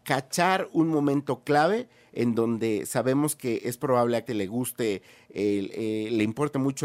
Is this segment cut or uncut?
cut